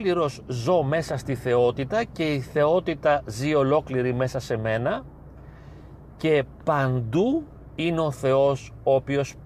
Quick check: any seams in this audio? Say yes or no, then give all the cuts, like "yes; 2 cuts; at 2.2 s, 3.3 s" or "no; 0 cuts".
no; 0 cuts